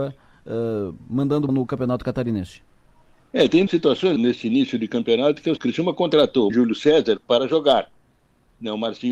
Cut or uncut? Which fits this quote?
cut